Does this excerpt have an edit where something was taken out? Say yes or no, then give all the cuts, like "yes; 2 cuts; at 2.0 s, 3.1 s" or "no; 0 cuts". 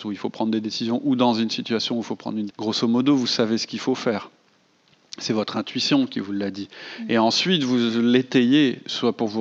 yes; 1 cut; at 2.5 s